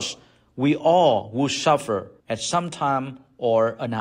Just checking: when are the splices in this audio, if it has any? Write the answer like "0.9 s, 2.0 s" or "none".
2.2 s

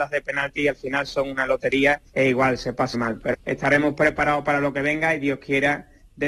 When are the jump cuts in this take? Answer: 2.1 s, 2.9 s, 3.3 s

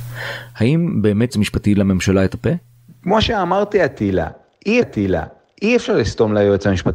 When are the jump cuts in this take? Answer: 1.3 s, 4.8 s

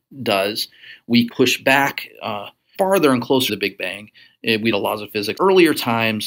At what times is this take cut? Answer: 1.3 s, 2.7 s, 3.5 s, 4.7 s, 5.4 s

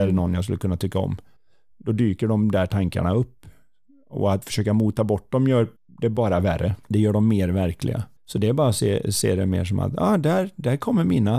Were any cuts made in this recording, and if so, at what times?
1.4 s, 5.8 s, 6.8 s, 8.2 s

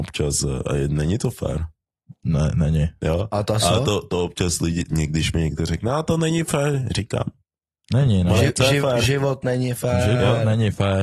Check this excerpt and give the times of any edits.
none

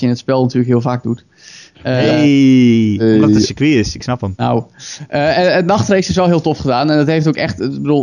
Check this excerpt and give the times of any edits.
none

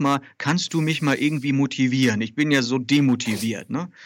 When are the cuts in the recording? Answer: none

